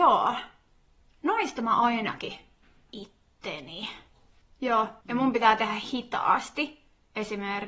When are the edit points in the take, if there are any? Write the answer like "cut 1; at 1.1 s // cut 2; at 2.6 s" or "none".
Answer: cut 1; at 2.9 s // cut 2; at 5.0 s // cut 3; at 5.9 s